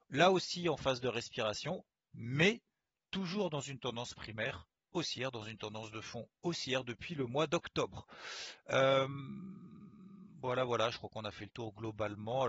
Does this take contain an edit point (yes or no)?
no